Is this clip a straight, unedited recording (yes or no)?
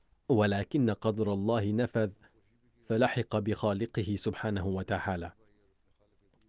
yes